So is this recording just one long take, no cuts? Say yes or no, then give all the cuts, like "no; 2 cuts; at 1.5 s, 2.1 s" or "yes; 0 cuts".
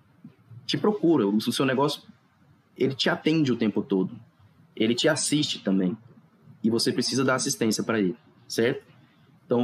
yes; 0 cuts